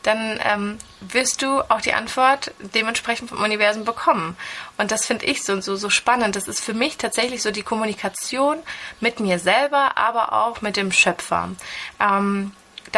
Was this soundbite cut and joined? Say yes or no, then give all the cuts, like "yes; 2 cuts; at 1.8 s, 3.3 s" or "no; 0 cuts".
no; 0 cuts